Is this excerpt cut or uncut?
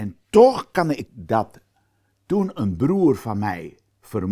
cut